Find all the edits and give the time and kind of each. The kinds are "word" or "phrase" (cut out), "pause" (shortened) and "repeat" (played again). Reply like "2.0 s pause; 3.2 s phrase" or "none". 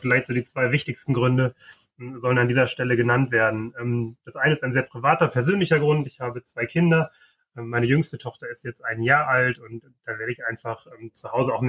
none

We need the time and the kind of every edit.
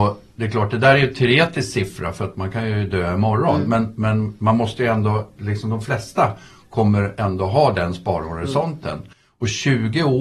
none

